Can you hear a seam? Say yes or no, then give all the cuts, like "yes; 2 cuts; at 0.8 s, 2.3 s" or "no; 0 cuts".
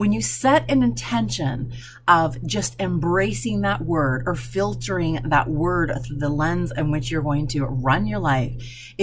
no; 0 cuts